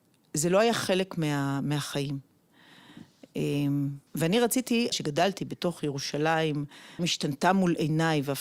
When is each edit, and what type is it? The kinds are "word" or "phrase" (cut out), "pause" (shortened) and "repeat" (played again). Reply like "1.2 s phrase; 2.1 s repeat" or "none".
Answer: 4.1 s pause; 4.9 s word; 7.0 s word